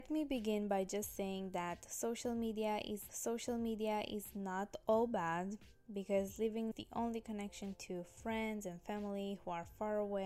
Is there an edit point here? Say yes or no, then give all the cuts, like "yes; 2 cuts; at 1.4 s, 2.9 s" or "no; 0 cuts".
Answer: yes; 2 cuts; at 3.1 s, 6.7 s